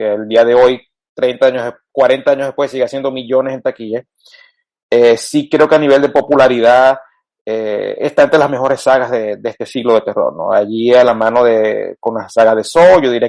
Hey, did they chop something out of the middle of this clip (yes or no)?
no